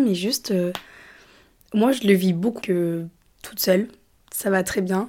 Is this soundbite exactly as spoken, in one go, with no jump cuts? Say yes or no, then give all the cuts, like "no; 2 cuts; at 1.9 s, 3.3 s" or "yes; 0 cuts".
no; 1 cut; at 2.6 s